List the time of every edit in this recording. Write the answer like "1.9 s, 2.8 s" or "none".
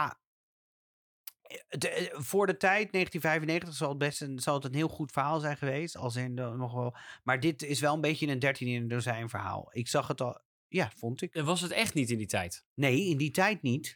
none